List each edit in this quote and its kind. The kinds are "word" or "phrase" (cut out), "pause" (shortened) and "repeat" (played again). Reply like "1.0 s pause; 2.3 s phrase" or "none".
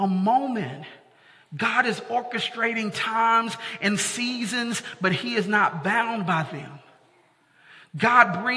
none